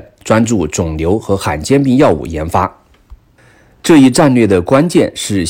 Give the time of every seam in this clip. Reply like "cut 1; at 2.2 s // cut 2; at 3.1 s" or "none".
none